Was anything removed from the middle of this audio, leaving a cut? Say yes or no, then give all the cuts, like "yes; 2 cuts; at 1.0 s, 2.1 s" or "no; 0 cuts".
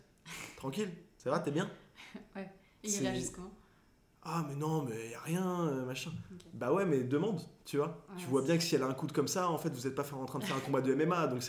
no; 0 cuts